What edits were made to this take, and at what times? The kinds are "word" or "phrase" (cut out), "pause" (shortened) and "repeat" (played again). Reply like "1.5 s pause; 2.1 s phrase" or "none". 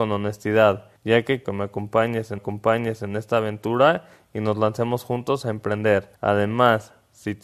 1.0 s pause; 1.4 s word; 2.4 s repeat; 6.2 s pause